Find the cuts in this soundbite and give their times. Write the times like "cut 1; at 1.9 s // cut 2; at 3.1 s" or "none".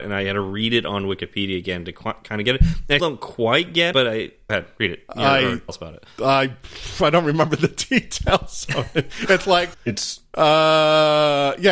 cut 1; at 3.0 s // cut 2; at 3.9 s // cut 3; at 4.5 s // cut 4; at 5.7 s // cut 5; at 9.7 s